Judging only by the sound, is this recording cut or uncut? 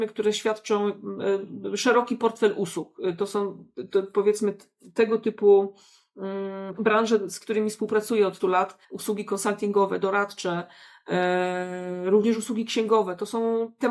cut